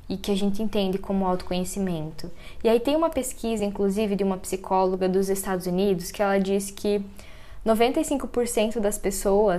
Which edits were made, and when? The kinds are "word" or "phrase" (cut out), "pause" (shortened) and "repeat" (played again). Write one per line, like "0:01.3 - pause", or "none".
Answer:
none